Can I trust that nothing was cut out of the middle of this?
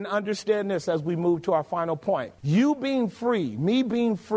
no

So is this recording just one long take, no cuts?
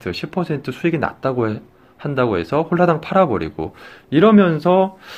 yes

